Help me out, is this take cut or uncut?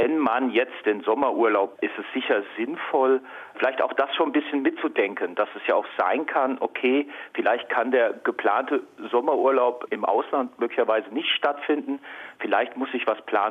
cut